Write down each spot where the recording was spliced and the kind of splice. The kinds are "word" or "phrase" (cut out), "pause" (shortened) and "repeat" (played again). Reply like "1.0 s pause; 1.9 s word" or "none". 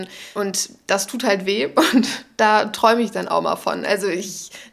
none